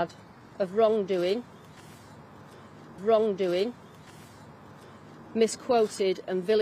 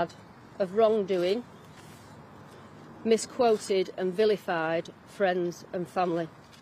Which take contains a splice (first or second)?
first